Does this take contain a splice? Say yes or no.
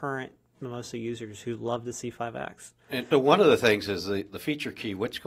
yes